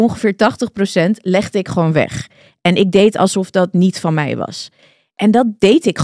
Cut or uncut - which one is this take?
uncut